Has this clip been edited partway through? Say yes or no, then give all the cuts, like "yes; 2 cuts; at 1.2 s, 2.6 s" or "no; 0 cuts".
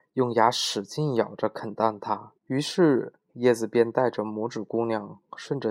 yes; 1 cut; at 2.4 s